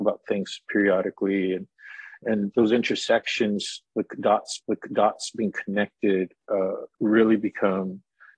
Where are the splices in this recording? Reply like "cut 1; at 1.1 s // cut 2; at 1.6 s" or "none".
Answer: cut 1; at 2.5 s // cut 2; at 4.6 s // cut 3; at 6.9 s

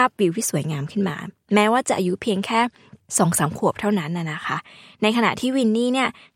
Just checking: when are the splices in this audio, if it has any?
none

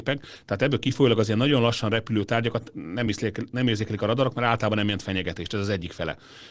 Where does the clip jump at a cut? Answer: none

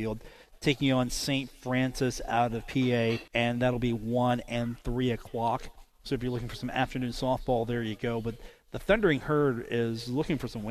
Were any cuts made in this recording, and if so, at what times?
cut 1; at 3.3 s

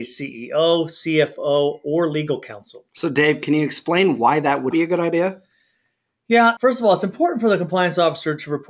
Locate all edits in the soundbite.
cut 1; at 2.9 s // cut 2; at 4.7 s // cut 3; at 6.6 s

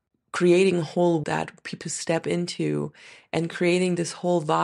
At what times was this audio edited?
cut 1; at 1.2 s // cut 2; at 1.8 s

